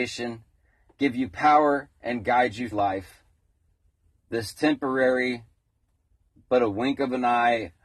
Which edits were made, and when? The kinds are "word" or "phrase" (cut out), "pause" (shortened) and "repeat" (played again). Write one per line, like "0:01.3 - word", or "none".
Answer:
0:02.7 - word